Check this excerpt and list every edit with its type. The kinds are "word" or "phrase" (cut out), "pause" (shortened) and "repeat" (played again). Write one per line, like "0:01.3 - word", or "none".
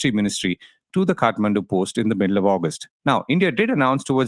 0:03.0 - pause